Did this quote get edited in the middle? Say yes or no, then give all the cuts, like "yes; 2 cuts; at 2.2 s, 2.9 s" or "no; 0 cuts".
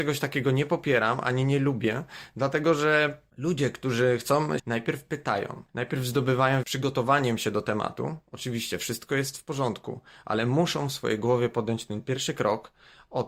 yes; 4 cuts; at 3.3 s, 4.6 s, 5.7 s, 6.6 s